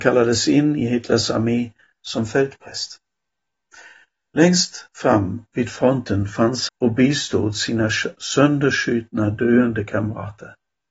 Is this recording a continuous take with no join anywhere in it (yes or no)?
no